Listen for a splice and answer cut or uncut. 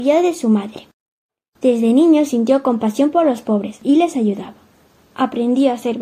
uncut